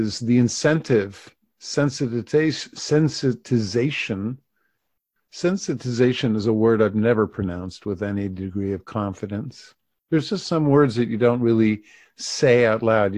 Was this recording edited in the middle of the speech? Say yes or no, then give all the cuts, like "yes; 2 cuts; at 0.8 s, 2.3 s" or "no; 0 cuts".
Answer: no; 0 cuts